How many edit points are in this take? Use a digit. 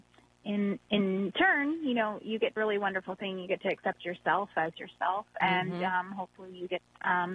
1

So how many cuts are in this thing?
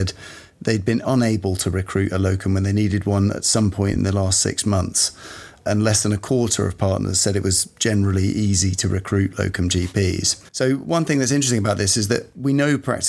1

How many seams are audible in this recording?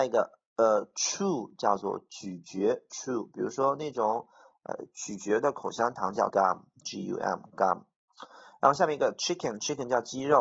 1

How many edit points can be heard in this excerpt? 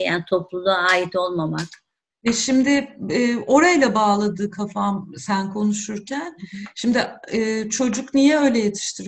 1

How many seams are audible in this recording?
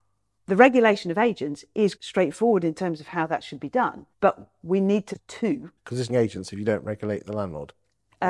5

